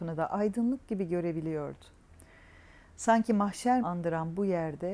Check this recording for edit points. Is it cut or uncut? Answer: cut